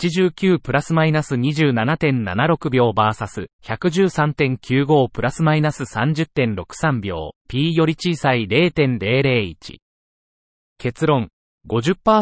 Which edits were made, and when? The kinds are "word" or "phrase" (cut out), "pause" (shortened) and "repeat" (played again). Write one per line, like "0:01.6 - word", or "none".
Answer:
0:03.5 - pause
0:07.4 - pause